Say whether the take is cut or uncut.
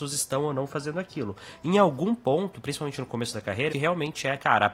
cut